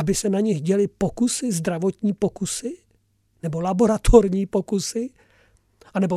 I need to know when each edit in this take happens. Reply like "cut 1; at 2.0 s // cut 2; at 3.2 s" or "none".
none